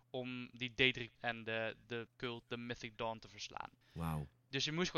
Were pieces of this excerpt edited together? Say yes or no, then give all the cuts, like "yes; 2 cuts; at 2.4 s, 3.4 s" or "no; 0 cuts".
yes; 4 cuts; at 1.2 s, 1.8 s, 2.1 s, 3.8 s